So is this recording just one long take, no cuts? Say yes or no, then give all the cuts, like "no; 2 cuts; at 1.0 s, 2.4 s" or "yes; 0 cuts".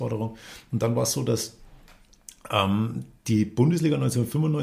yes; 0 cuts